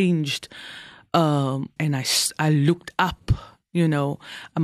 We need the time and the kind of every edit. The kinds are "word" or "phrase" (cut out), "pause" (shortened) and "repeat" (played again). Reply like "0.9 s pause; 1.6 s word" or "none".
1.8 s word